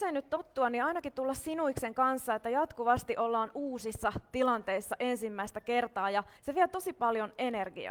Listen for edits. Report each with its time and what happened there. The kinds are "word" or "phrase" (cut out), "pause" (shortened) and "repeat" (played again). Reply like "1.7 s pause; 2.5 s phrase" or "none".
6.4 s pause